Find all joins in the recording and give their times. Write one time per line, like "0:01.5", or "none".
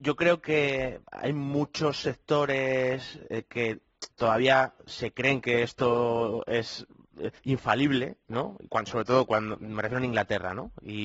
0:04.1
0:07.4